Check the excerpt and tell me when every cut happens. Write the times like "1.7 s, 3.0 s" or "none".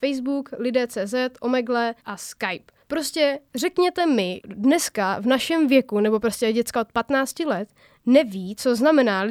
2.0 s, 2.8 s, 4.4 s